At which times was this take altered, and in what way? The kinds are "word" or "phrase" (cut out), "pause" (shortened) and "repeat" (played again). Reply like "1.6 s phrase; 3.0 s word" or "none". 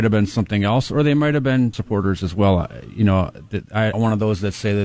1.7 s word; 3.9 s phrase